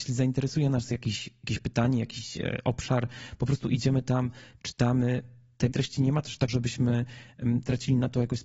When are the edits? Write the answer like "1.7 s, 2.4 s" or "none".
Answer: 5.7 s, 6.5 s